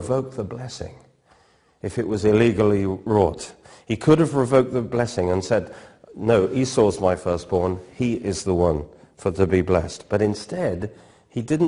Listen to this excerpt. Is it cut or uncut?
uncut